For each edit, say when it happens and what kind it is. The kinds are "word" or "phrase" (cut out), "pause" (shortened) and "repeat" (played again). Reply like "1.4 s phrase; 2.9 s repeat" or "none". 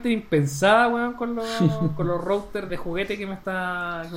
2.7 s word